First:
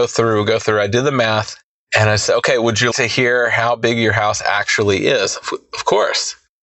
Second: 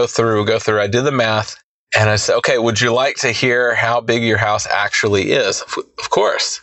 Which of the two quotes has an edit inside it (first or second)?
first